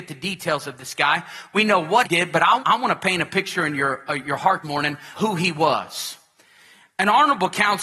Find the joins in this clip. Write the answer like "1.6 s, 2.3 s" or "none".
2.0 s, 2.6 s, 4.6 s, 5.1 s